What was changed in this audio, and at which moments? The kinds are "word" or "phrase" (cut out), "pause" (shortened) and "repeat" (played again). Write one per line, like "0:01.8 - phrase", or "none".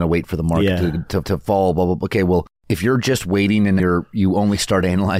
0:01.2 - repeat
0:02.6 - pause
0:03.8 - word